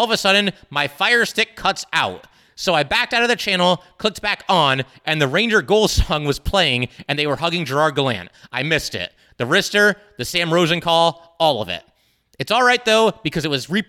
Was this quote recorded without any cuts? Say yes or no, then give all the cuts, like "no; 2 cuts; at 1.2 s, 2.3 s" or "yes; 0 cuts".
yes; 0 cuts